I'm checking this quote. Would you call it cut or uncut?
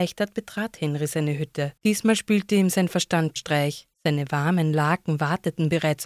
cut